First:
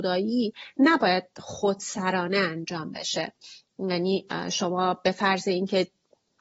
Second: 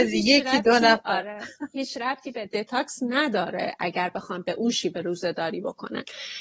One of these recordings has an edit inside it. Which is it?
second; 1 cut; at 2.5 s

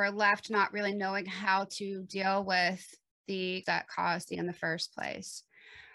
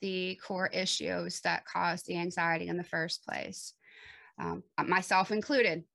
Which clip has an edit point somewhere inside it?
first; 2 cuts; at 3.6 s, 4.3 s

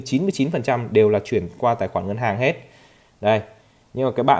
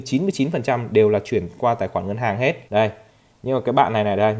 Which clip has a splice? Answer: second; 1 cut; at 2.7 s

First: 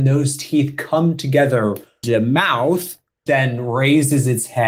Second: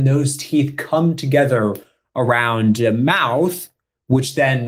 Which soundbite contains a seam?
first; 2 cuts; at 2.0 s, 3.3 s

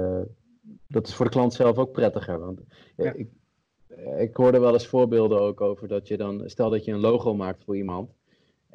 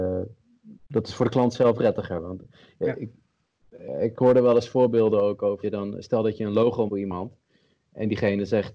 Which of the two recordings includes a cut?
second; 3 cuts; at 1.8 s, 5.6 s, 6.9 s

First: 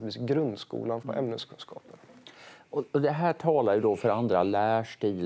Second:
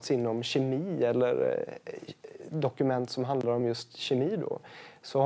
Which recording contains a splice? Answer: first; 1 cut; at 1.0 s

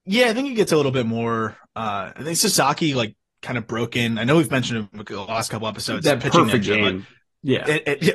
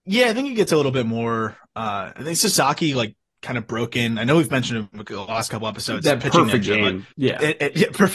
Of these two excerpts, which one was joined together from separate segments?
second; 1 cut; at 7.1 s

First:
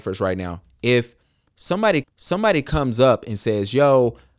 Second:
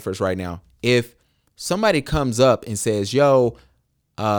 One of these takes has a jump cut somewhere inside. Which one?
first; 1 cut; at 2.0 s

